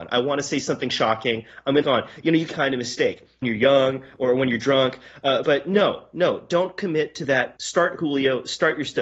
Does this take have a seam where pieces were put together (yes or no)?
yes